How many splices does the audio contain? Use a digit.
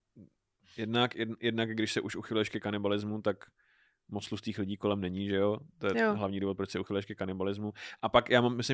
0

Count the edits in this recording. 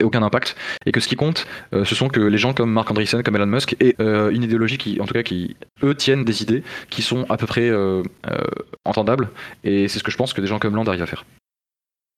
2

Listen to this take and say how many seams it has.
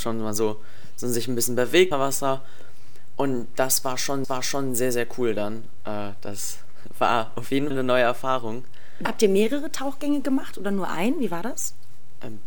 4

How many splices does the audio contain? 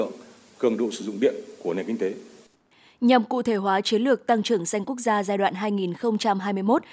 0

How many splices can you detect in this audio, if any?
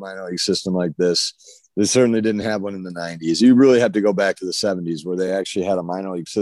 0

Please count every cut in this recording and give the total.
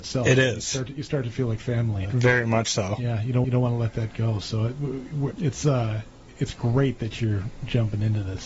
3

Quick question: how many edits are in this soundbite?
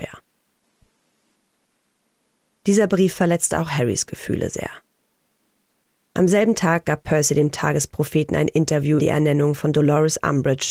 1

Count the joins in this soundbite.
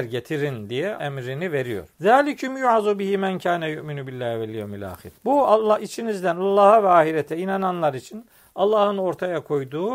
3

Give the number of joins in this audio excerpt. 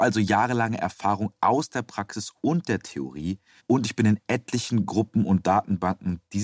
1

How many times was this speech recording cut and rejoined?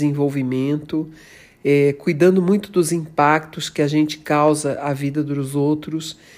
0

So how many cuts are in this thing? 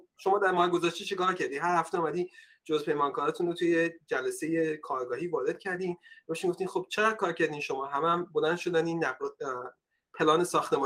0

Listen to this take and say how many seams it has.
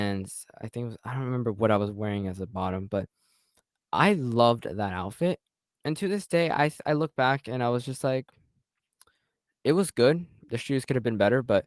0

